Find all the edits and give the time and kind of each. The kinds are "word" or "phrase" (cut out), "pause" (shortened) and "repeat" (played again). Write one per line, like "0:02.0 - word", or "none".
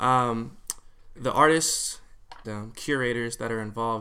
0:01.2 - word
0:02.4 - word